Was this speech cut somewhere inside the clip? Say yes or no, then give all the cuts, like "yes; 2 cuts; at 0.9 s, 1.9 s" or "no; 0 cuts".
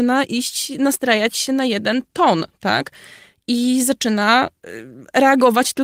no; 0 cuts